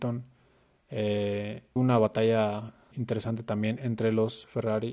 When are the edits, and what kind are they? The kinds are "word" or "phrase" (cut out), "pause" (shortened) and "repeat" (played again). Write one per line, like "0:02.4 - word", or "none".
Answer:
0:01.8 - word
0:02.9 - word